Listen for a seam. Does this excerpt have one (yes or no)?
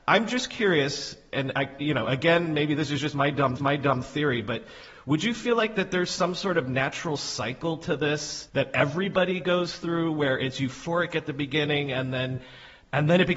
yes